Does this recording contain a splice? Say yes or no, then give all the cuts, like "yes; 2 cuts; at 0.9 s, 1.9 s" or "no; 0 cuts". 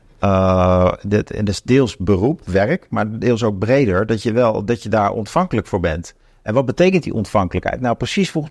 no; 0 cuts